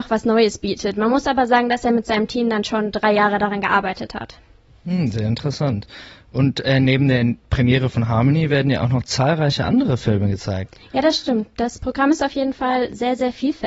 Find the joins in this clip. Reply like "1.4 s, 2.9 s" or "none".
none